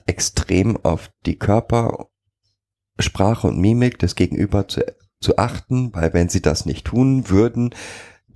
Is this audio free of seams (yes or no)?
yes